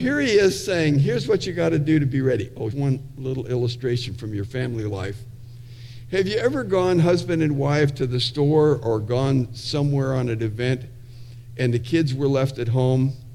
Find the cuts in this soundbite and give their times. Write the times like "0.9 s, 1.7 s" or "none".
2.7 s